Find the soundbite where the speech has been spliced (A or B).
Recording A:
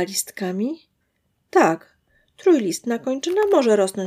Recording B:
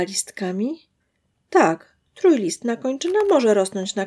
B